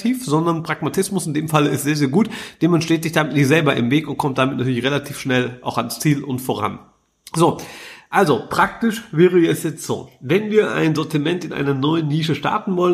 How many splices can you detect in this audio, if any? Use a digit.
0